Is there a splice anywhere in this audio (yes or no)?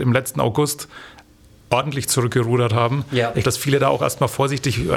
yes